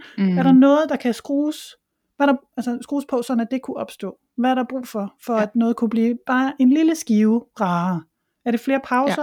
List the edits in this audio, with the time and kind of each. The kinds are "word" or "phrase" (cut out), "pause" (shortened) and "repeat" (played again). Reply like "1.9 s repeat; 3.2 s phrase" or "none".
none